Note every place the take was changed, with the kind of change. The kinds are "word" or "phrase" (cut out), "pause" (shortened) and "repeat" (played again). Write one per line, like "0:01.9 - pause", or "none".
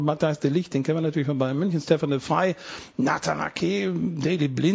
none